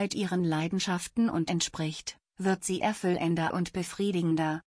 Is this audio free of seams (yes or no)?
no